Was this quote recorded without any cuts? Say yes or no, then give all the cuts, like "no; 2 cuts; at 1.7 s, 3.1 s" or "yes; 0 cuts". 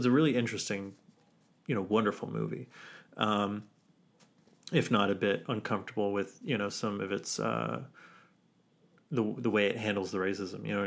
yes; 0 cuts